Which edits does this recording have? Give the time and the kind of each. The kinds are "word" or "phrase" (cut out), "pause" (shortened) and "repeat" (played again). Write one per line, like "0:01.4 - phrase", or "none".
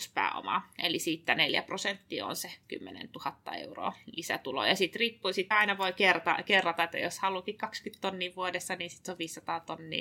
0:02.6 - pause
0:05.5 - word